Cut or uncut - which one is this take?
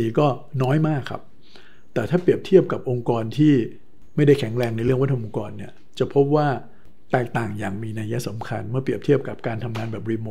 uncut